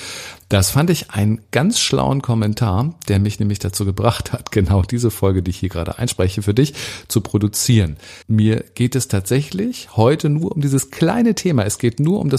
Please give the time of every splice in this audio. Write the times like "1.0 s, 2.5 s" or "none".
8.2 s